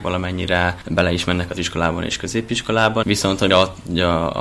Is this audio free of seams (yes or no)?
no